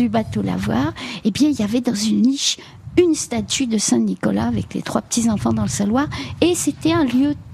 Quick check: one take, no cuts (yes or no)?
yes